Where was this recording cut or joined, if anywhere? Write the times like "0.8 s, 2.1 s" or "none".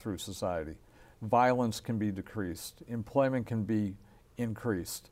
none